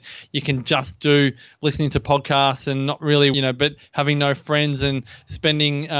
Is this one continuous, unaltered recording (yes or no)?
no